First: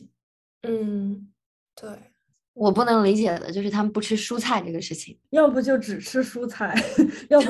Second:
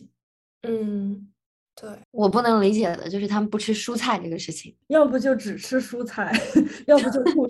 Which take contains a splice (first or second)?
second